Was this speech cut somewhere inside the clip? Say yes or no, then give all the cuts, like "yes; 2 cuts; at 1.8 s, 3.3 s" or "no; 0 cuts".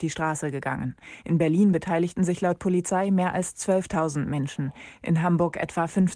no; 0 cuts